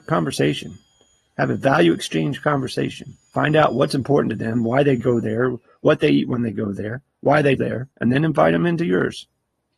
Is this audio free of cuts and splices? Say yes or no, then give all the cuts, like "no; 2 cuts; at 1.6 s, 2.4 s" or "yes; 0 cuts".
no; 2 cuts; at 7.6 s, 7.9 s